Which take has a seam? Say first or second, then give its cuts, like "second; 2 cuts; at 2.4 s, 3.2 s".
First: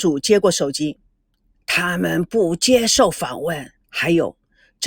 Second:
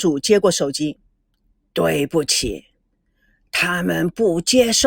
first; 2 cuts; at 1.5 s, 3.8 s